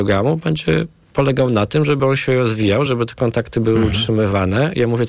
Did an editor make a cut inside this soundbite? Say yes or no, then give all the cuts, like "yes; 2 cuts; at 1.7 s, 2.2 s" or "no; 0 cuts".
no; 0 cuts